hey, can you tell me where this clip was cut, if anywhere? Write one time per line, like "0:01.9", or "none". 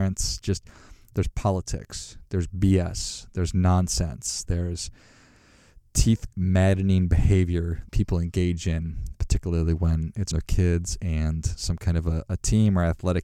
0:06.3
0:07.9
0:09.1
0:10.3